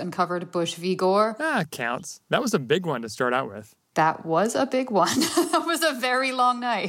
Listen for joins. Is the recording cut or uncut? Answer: cut